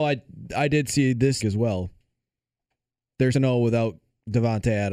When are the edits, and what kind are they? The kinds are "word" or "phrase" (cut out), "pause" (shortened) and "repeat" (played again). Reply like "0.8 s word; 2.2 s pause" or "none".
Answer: 1.4 s word; 3.3 s word